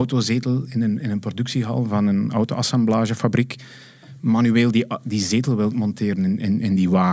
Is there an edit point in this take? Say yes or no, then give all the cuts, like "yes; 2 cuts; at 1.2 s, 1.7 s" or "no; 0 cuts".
no; 0 cuts